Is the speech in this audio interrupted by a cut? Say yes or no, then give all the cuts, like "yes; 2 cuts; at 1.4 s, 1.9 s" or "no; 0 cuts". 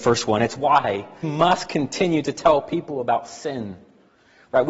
yes; 1 cut; at 1.2 s